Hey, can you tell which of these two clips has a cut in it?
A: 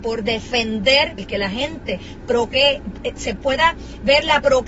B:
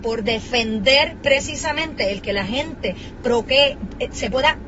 A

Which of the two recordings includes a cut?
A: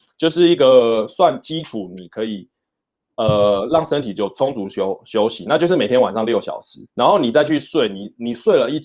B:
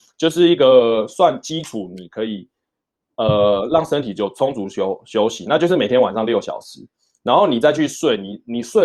A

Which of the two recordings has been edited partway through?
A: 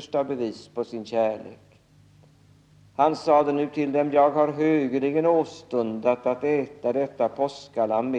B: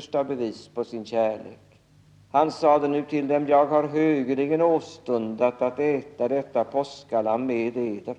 B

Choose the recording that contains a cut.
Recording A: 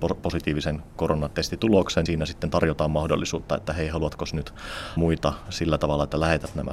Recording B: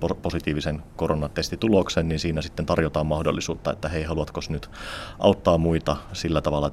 A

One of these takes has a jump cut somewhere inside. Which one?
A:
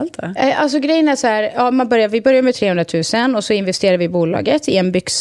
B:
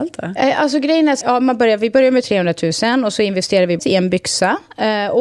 B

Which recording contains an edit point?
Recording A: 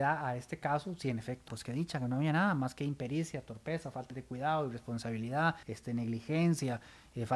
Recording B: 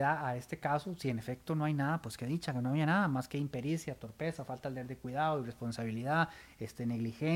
A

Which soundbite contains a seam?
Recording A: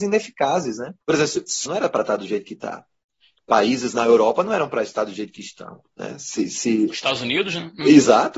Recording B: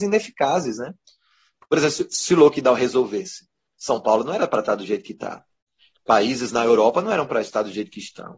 A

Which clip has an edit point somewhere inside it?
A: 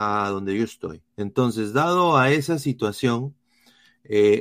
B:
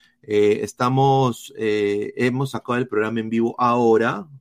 A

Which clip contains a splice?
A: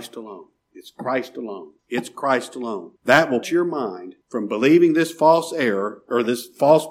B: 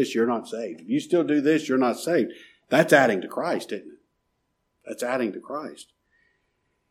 A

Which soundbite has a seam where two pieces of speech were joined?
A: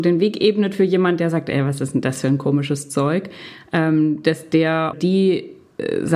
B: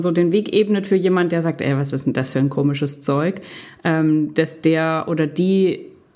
A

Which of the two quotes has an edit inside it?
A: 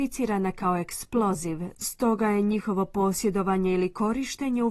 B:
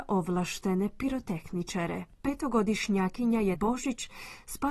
B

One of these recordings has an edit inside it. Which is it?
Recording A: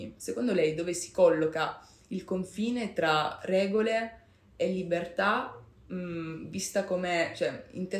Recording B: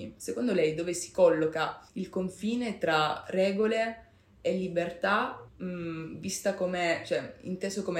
B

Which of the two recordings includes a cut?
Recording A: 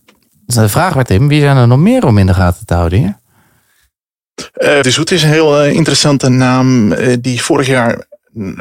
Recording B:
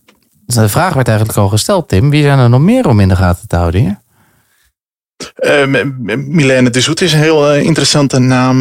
A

